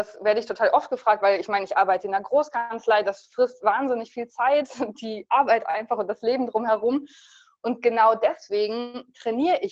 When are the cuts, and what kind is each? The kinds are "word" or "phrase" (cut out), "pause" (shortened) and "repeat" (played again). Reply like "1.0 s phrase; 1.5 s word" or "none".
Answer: none